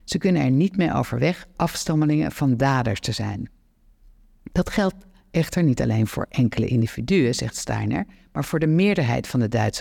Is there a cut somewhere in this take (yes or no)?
no